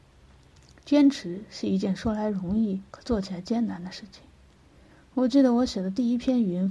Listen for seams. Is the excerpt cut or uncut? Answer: cut